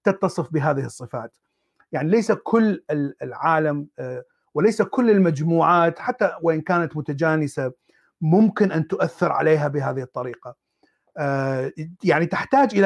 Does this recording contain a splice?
no; 0 cuts

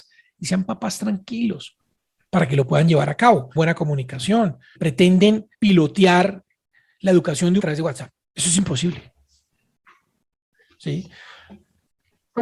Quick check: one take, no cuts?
no; 6 cuts; at 2.0 s, 3.6 s, 4.7 s, 5.5 s, 7.6 s, 8.2 s

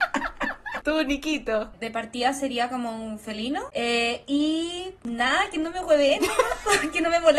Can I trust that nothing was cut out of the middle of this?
yes; 0 cuts

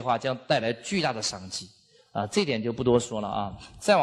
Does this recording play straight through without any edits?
yes; 0 cuts

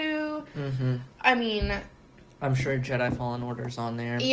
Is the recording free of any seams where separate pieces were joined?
no; 1 cut; at 1.1 s

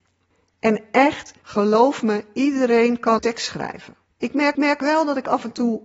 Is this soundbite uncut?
no; 4 cuts; at 1.4 s, 3.2 s, 4.1 s, 4.5 s

